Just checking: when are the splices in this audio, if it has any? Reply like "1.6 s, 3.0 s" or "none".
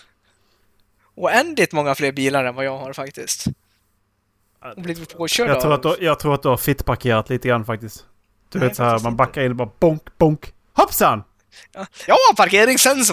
6.0 s, 12.1 s